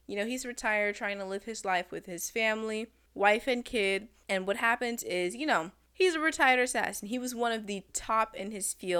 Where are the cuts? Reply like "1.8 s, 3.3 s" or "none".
none